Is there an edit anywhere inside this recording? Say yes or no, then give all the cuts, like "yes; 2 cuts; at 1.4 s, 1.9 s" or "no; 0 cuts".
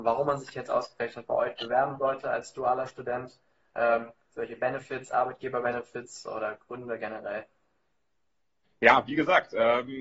no; 0 cuts